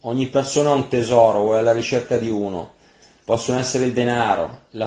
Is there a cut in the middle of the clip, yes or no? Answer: no